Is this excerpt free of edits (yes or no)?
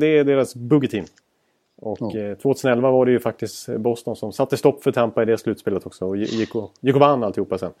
yes